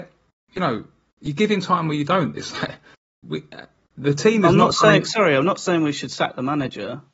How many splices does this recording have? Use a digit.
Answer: 0